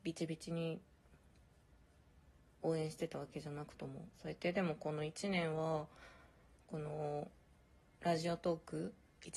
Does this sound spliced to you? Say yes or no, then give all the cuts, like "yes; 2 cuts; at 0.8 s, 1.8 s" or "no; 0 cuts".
yes; 2 cuts; at 2.4 s, 4.1 s